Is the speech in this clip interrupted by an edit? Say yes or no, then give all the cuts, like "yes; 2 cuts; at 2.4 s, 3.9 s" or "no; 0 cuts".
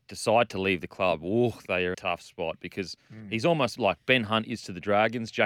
yes; 1 cut; at 1.9 s